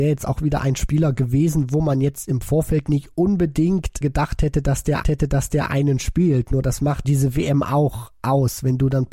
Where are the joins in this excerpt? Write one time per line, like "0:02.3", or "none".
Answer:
0:04.0
0:05.0
0:07.0